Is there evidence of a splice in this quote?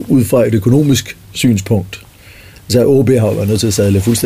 no; 0 cuts

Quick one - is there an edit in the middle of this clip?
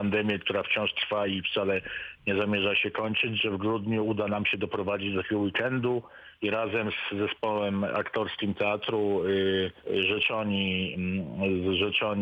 yes; 2 cuts; at 6.3 s, 9.8 s

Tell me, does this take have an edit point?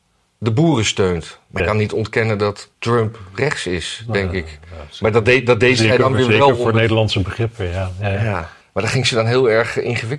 yes; 3 cuts; at 1.6 s, 2.7 s, 8.6 s

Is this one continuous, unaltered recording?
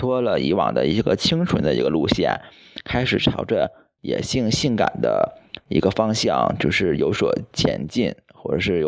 yes; 0 cuts

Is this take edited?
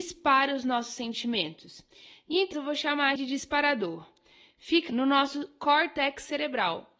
yes; 3 cuts; at 2.5 s, 3.2 s, 4.9 s

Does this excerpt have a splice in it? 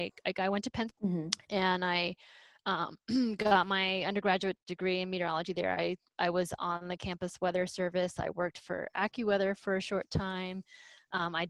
yes; 1 cut; at 0.9 s

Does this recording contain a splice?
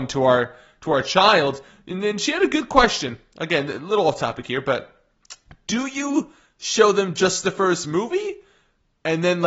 no; 0 cuts

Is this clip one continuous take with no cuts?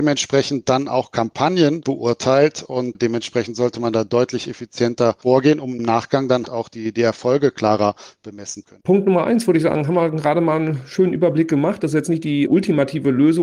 no; 2 cuts; at 6.4 s, 8.6 s

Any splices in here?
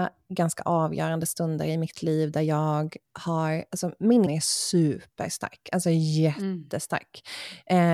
yes; 2 cuts; at 3.0 s, 4.3 s

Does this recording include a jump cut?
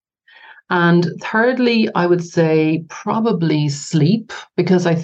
no; 0 cuts

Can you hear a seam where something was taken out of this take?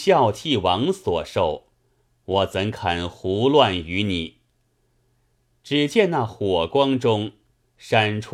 no; 0 cuts

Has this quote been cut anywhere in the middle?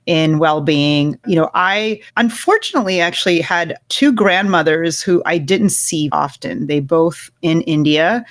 yes; 4 cuts; at 2.1 s, 3.8 s, 6.1 s, 7.4 s

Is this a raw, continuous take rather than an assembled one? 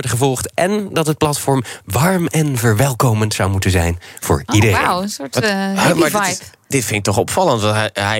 yes; 0 cuts

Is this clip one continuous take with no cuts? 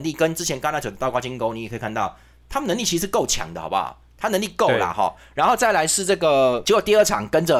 yes; 0 cuts

